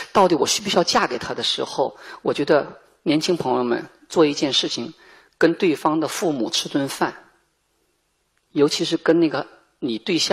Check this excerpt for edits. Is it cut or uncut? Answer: uncut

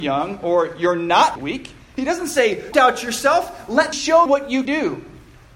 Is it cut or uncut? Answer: cut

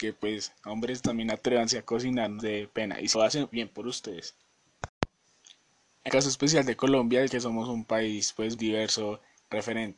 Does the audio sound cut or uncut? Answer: cut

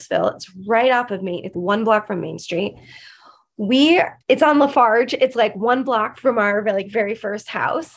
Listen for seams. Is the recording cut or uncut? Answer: cut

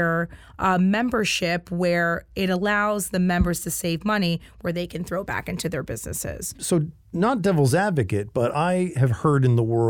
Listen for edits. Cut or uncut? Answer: cut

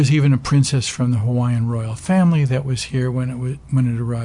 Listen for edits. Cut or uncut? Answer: uncut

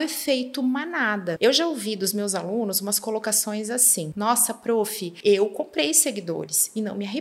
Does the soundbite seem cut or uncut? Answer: uncut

